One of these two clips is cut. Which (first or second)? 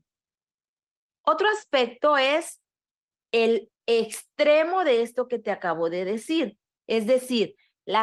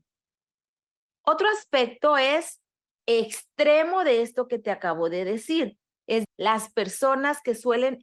second